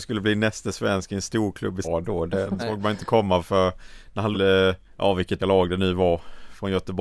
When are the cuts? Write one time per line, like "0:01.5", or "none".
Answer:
0:01.8
0:02.6
0:04.3
0:04.8
0:05.4